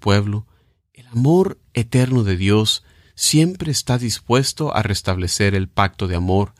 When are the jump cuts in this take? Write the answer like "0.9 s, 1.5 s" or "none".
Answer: none